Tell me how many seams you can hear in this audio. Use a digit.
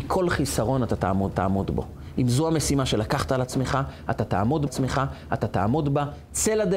2